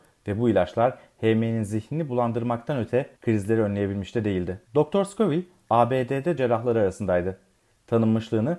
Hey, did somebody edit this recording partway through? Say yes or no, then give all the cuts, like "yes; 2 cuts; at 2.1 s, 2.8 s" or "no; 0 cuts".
yes; 3 cuts; at 3.2 s, 4.6 s, 6.4 s